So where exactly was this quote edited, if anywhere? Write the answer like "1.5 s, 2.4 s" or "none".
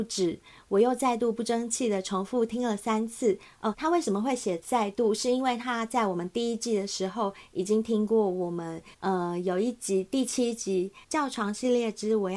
3.7 s, 8.9 s, 11.0 s